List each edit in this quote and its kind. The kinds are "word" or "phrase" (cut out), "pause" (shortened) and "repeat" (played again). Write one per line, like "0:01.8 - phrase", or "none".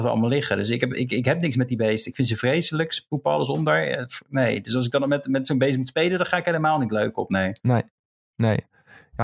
0:07.6 - pause